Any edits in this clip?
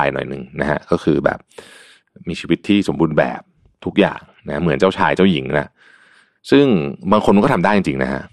no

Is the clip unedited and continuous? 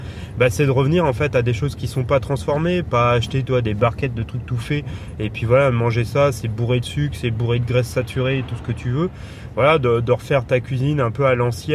yes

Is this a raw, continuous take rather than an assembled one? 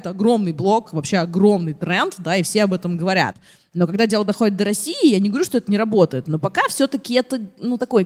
yes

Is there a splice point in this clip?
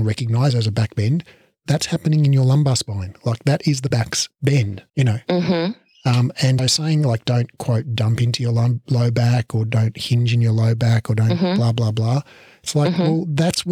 yes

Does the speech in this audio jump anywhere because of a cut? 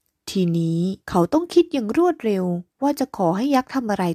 yes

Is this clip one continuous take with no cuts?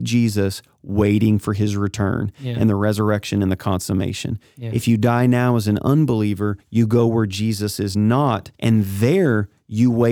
no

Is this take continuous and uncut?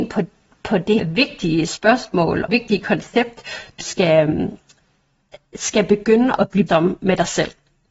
no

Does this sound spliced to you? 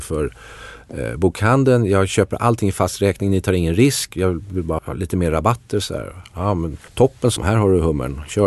yes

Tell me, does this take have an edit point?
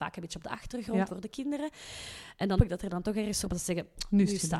yes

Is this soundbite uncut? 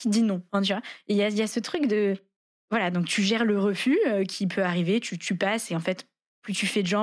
no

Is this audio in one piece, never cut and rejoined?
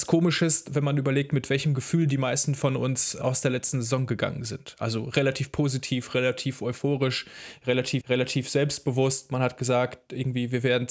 no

